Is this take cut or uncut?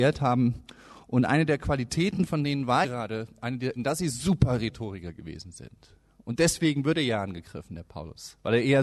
cut